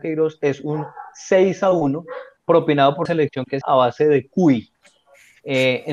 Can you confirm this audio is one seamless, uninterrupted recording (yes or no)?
no